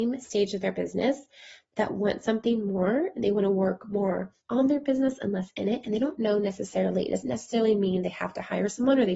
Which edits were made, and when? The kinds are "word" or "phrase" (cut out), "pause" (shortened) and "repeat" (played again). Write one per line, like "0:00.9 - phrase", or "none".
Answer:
0:04.4 - pause

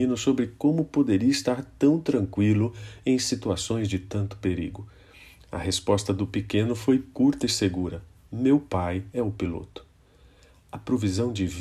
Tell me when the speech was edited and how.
none

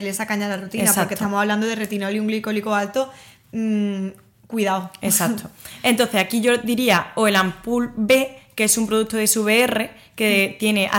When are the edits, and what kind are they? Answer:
none

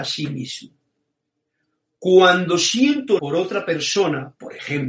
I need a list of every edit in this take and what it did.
0:03.2 - word

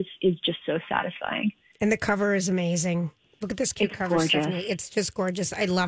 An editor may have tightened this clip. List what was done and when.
none

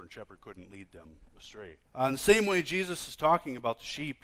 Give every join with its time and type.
0:01.9 - pause

